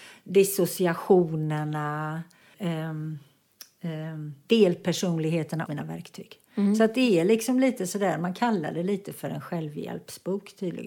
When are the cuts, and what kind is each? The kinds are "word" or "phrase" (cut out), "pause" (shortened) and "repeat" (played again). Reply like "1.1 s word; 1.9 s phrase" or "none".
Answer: 2.5 s word; 5.7 s word